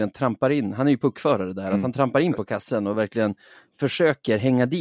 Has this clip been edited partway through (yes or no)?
no